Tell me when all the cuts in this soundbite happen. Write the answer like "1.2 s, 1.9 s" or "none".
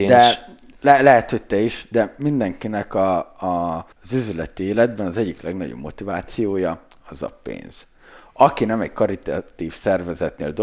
3.9 s